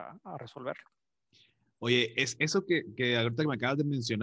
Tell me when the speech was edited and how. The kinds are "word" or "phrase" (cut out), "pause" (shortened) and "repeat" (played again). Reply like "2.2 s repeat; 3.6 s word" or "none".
none